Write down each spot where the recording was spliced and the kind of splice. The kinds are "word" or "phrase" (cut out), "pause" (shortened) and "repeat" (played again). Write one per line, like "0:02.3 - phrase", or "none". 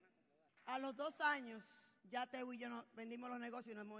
0:02.0 - pause